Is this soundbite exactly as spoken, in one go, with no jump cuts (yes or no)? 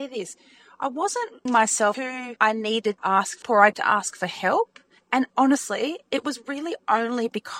no